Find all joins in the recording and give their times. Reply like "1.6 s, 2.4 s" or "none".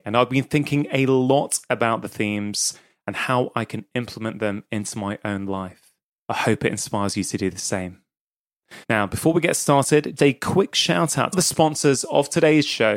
6.1 s, 8.8 s, 10.2 s, 11.3 s